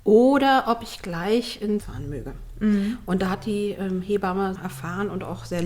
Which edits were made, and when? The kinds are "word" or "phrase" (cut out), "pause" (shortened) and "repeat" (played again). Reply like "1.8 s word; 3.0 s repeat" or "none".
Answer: 1.8 s word; 4.6 s word